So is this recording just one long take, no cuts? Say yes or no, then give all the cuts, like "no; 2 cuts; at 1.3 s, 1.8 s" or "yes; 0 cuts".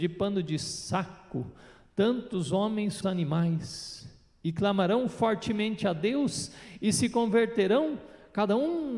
no; 1 cut; at 3.0 s